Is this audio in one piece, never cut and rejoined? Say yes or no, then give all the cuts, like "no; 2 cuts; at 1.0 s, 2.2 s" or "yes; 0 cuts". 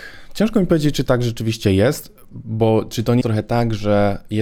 no; 1 cut; at 3.2 s